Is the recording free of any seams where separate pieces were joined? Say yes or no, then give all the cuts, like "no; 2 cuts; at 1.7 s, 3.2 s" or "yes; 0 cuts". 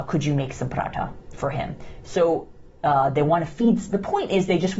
no; 2 cuts; at 1.3 s, 2.7 s